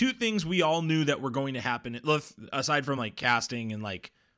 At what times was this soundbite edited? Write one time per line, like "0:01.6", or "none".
none